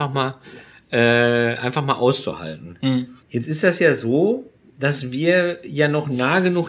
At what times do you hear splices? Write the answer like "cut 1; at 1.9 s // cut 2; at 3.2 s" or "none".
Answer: cut 1; at 3.2 s